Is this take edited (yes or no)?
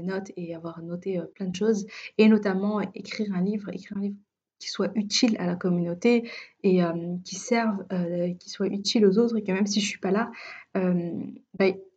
no